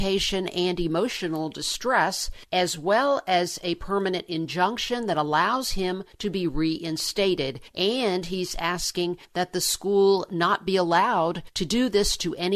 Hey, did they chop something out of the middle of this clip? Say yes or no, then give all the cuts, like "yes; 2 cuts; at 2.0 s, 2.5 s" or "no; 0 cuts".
no; 0 cuts